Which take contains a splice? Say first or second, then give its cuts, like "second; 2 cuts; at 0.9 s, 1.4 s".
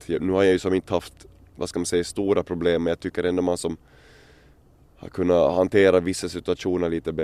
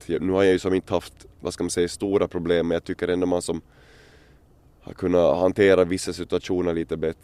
second; 1 cut; at 1.3 s